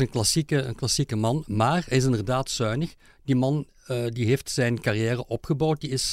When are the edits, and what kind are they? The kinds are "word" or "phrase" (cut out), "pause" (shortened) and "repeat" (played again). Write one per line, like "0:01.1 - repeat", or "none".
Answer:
none